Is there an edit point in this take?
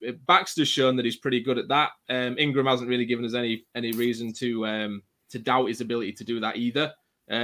no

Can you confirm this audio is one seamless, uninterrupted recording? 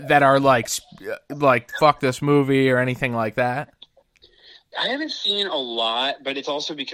no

